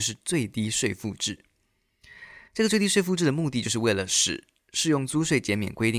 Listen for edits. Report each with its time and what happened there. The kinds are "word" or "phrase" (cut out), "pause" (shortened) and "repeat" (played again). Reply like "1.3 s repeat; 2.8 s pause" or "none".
2.5 s pause